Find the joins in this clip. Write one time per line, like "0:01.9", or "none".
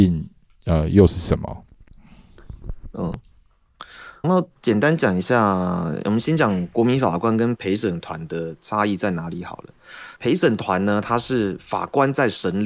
0:04.2
0:10.2